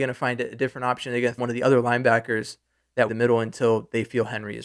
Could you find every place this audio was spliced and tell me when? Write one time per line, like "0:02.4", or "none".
0:01.4
0:03.1